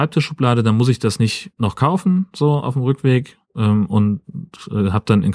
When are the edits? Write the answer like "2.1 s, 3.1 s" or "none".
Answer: 1.5 s